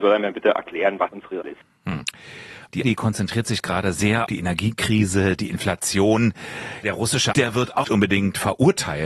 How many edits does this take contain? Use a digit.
7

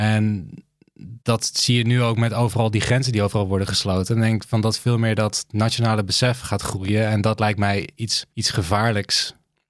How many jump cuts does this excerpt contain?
2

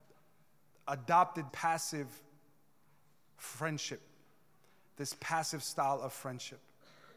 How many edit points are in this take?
1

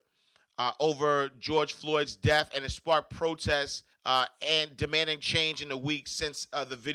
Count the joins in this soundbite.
1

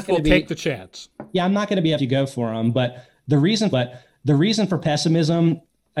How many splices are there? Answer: 2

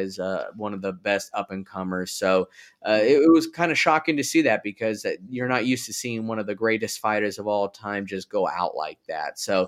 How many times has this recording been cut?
0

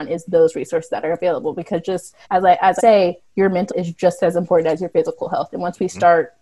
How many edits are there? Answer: 3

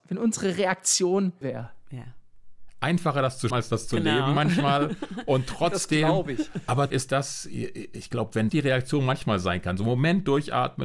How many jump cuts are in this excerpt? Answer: 4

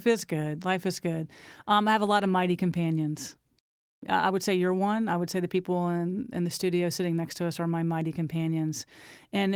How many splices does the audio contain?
0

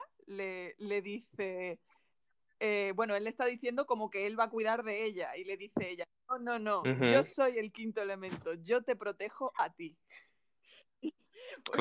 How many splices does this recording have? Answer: 0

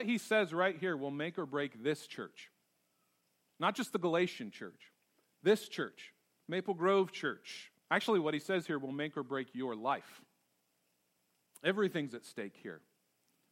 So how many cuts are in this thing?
1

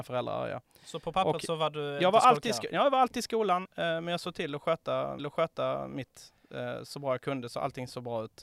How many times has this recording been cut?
2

